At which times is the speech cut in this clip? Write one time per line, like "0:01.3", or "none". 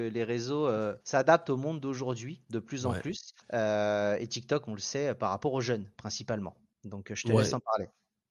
0:01.0
0:03.4

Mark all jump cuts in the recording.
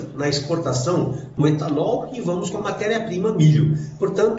0:01.4
0:02.5

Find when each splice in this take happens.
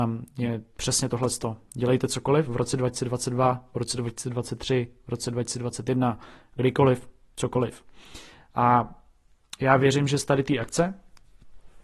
none

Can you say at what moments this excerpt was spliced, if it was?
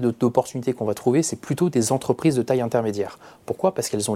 none

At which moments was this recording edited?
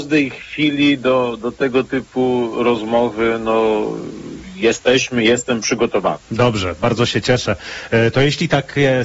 0:06.2

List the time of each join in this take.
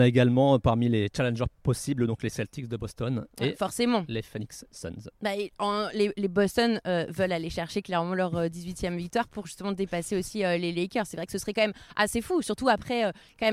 none

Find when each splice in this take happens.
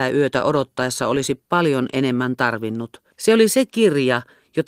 0:03.1

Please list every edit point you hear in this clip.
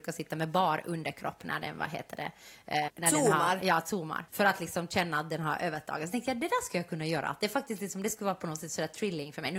0:02.9
0:04.3

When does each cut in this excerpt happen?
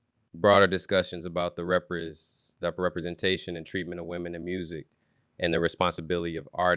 none

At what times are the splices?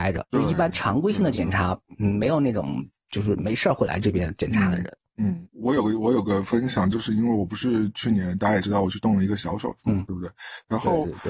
none

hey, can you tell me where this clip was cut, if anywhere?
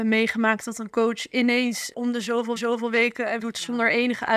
0:01.9
0:02.6
0:03.4

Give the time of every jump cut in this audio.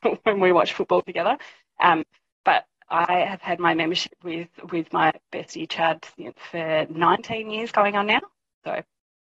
none

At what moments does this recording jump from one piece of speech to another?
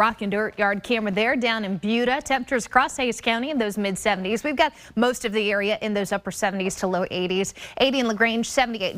none

